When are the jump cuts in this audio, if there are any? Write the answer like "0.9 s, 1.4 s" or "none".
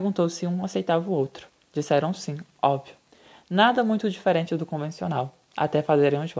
none